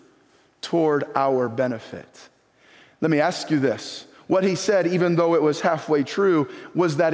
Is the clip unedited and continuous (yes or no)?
yes